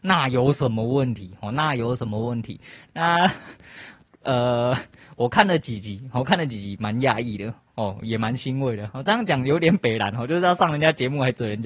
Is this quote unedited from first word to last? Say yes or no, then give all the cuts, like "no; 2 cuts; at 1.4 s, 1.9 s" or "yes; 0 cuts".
yes; 0 cuts